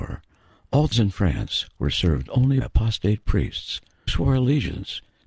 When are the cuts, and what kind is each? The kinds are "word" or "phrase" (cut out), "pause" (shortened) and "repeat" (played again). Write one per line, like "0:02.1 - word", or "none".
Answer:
0:00.9 - word
0:02.6 - word
0:04.1 - word